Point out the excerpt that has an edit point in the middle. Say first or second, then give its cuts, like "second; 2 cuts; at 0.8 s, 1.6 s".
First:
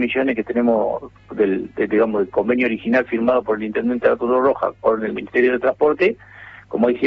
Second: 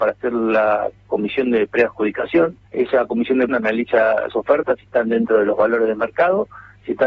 second; 3 cuts; at 2.6 s, 3.5 s, 4.3 s